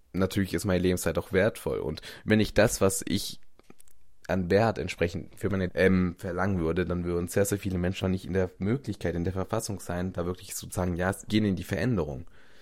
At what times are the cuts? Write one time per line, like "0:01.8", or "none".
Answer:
0:05.7
0:08.0
0:11.3